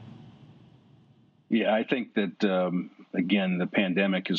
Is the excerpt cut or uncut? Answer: uncut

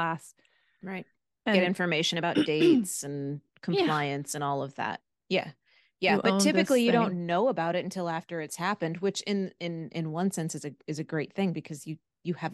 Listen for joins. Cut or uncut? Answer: uncut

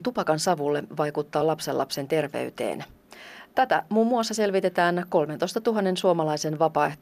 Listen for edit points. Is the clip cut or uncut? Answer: uncut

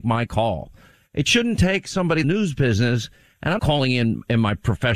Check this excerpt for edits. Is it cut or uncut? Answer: cut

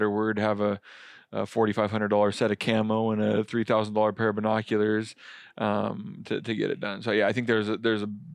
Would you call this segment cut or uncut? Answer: uncut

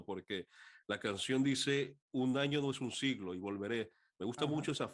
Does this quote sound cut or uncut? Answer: cut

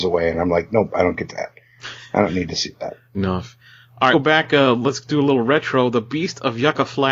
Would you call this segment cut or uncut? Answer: cut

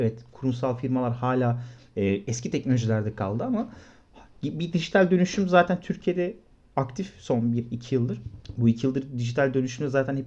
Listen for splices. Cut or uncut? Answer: uncut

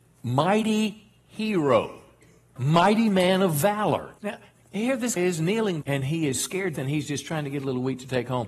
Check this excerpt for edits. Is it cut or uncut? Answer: cut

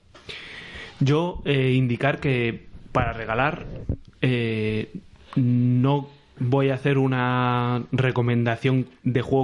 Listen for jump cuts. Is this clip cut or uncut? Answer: uncut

